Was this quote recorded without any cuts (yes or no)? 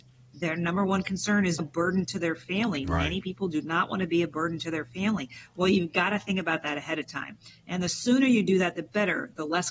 no